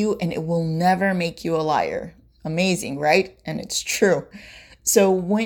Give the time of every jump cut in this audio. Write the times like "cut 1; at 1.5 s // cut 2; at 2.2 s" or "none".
none